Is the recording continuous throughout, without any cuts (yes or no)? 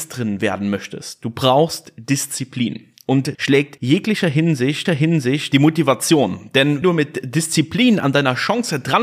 no